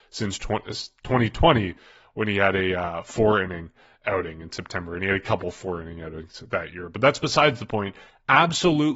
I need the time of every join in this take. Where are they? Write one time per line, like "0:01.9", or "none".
none